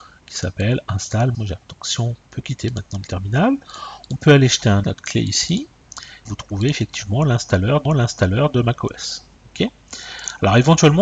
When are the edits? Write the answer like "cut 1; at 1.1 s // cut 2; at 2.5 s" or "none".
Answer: cut 1; at 1.3 s // cut 2; at 2.3 s // cut 3; at 4.8 s // cut 4; at 6.3 s // cut 5; at 7.9 s